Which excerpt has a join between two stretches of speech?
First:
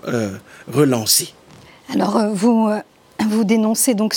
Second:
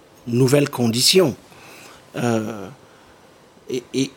first; 1 cut; at 1.6 s

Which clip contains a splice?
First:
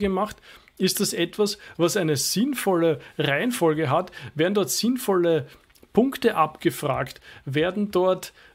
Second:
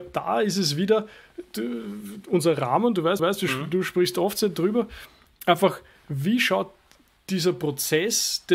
second; 1 cut; at 3.2 s

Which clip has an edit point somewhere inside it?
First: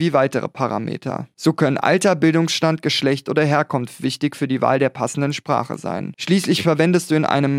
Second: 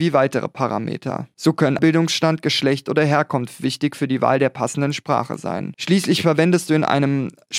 second; 1 cut; at 1.8 s

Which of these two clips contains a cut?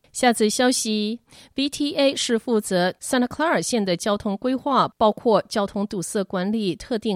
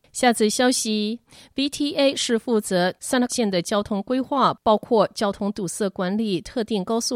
second; 1 cut; at 3.3 s

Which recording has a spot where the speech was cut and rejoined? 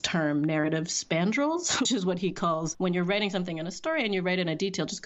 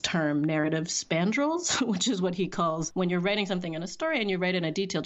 first; 1 cut; at 1.8 s

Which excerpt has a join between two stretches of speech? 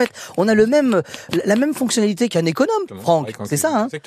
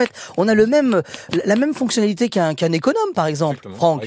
first; 2 cuts; at 2.3 s, 2.9 s

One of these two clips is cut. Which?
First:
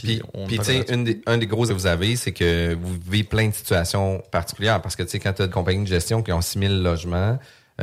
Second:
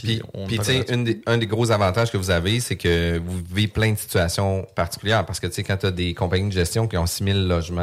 first; 2 cuts; at 1.7 s, 5.5 s

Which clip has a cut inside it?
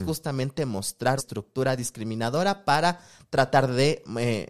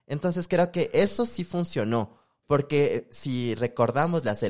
first; 1 cut; at 1.2 s

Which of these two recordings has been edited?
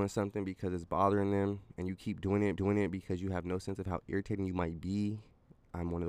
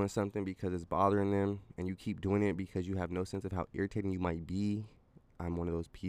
first; 1 cut; at 2.6 s

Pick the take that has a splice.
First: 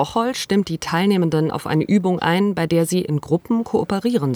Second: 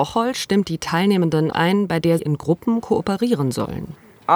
second; 2 cuts; at 1.5 s, 2.2 s

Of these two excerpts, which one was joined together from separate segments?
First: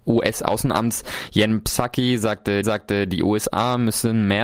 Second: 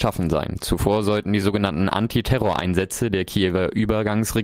first; 1 cut; at 2.6 s

